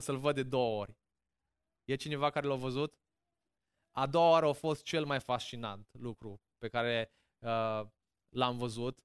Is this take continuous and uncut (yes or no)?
yes